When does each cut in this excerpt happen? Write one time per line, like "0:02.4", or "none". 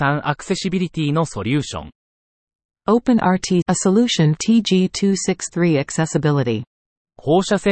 0:03.6
0:04.4